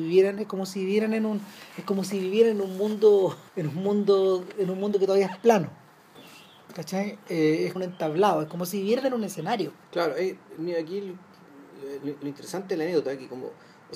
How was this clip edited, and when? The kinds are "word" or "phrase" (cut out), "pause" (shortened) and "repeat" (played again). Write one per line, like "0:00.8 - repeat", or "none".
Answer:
0:03.5 - pause
0:07.8 - phrase
0:09.8 - pause
0:12.0 - word